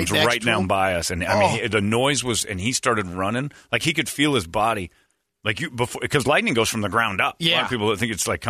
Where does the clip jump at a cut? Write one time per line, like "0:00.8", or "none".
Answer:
none